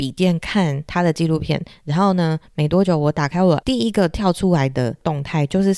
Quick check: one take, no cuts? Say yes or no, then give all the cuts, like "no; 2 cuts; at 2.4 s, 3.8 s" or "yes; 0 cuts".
no; 1 cut; at 3.6 s